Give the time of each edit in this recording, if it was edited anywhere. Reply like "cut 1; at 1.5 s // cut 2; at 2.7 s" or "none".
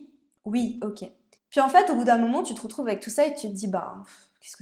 cut 1; at 1.4 s